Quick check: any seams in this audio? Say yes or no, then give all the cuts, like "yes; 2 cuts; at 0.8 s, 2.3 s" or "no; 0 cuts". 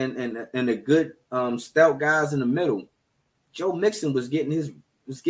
no; 0 cuts